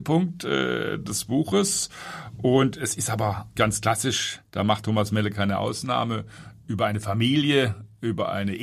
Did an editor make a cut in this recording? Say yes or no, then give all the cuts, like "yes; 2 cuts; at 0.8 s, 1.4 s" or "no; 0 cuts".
yes; 2 cuts; at 3.6 s, 4.4 s